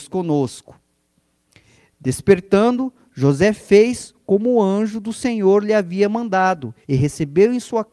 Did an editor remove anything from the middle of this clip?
yes; 1 cut; at 6.8 s

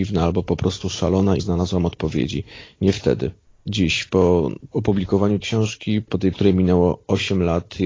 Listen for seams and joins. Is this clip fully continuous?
no; 4 cuts; at 1.4 s, 3.5 s, 5.4 s, 6.3 s

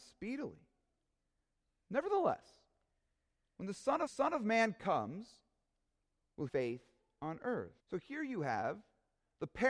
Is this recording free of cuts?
no; 3 cuts; at 4.1 s, 6.5 s, 7.8 s

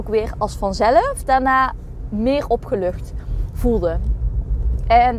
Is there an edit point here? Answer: no; 0 cuts

